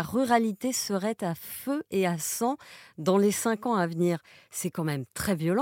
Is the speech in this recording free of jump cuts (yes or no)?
yes